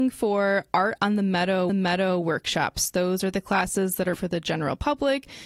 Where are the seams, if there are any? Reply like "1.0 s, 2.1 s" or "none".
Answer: 1.7 s, 4.1 s